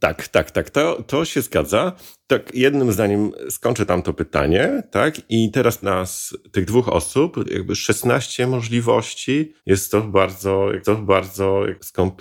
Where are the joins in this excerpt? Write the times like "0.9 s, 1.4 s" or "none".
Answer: 5.8 s, 7.5 s, 9.6 s, 10.8 s